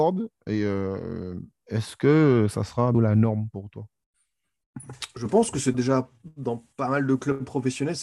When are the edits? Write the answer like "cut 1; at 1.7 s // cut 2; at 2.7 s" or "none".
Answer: cut 1; at 2.9 s // cut 2; at 5.7 s